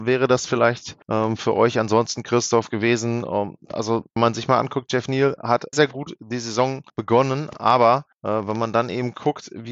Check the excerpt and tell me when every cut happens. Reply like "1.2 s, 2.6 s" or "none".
1.0 s, 4.2 s, 5.7 s, 6.9 s, 8.1 s